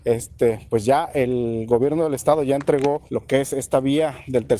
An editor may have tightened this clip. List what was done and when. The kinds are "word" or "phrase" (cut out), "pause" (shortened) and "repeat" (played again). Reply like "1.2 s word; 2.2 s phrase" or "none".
3.1 s pause